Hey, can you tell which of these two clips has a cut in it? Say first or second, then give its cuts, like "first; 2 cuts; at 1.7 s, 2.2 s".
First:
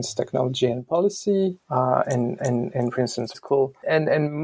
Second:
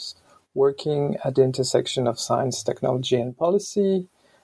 first; 3 cuts; at 1.6 s, 2.4 s, 3.3 s